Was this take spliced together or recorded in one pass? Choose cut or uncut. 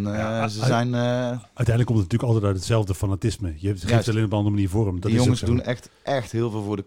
uncut